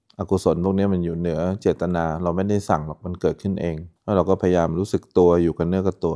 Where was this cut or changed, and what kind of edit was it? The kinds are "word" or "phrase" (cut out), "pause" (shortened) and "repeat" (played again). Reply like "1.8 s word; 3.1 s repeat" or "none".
4.0 s pause